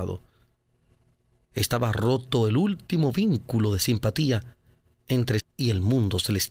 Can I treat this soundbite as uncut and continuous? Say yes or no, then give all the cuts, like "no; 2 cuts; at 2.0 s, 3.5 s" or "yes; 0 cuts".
no; 1 cut; at 5.4 s